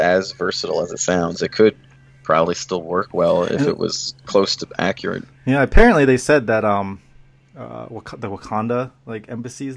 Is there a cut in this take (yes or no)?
no